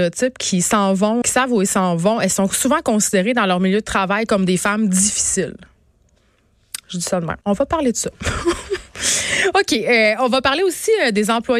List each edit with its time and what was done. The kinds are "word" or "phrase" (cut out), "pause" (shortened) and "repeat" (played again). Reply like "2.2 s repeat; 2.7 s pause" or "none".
1.2 s word; 7.4 s pause